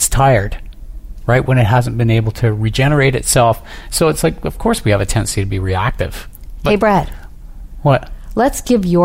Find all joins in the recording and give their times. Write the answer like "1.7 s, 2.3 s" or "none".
none